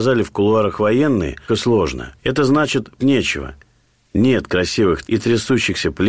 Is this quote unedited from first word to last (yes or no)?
no